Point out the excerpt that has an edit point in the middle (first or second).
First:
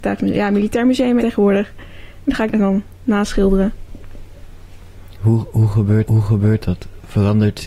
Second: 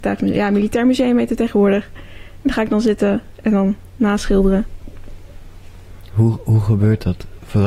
first